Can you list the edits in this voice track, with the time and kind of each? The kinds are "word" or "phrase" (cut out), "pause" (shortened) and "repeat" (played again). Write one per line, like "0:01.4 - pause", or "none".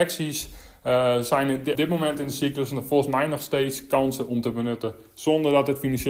0:01.7 - word